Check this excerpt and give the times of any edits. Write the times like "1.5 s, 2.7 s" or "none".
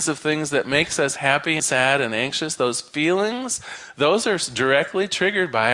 1.6 s